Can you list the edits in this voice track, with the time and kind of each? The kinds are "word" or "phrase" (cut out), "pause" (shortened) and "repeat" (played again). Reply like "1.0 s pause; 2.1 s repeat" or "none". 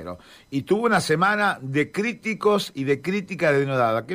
none